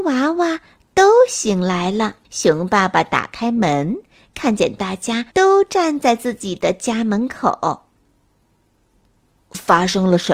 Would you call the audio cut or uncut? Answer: cut